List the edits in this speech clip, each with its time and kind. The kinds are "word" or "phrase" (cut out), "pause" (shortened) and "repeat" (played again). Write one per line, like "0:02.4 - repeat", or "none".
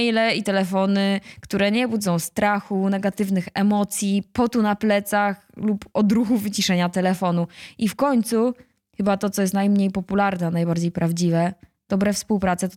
none

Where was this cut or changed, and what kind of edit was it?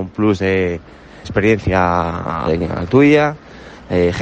0:01.2 - word
0:02.5 - phrase

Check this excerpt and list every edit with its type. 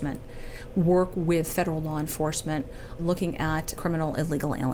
0:03.0 - word
0:03.8 - word

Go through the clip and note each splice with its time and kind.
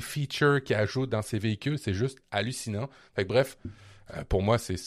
none

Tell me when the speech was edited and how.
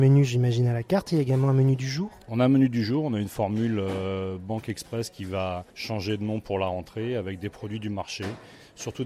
0:02.2 - pause
0:05.7 - pause

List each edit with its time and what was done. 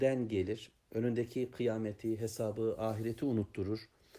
none

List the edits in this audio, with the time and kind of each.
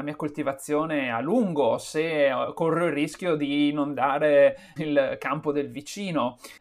0:04.8 - word

